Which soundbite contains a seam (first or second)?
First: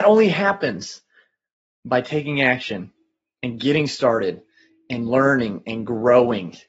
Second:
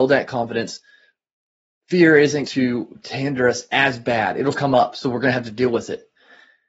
second